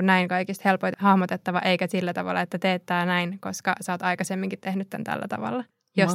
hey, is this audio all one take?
no; 1 cut; at 0.9 s

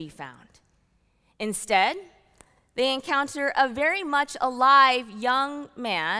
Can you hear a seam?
no; 0 cuts

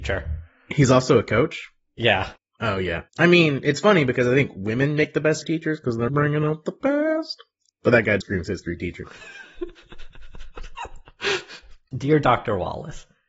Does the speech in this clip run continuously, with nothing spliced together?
no; 6 cuts; at 2.4 s, 3.1 s, 5.4 s, 6.1 s, 7.7 s, 8.2 s

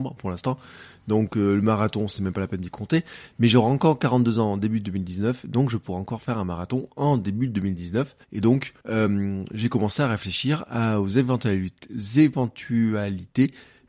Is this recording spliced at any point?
yes; 2 cuts; at 8.2 s, 8.8 s

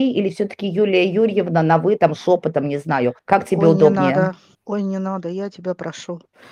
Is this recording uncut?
no; 2 cuts; at 3.2 s, 4.5 s

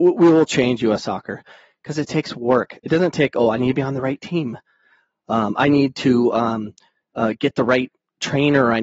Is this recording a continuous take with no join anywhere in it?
yes; 0 cuts

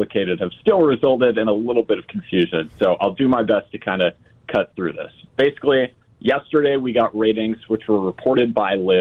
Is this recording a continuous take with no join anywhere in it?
yes; 0 cuts

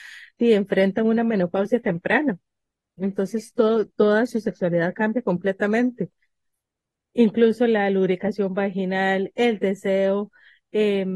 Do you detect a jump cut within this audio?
no; 0 cuts

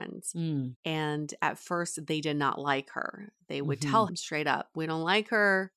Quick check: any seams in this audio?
yes; 1 cut; at 4.1 s

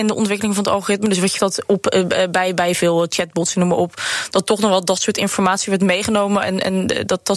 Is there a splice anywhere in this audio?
yes; 1 cut; at 1.4 s

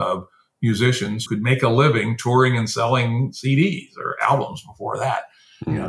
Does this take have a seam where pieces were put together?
yes; 1 cut; at 1.3 s

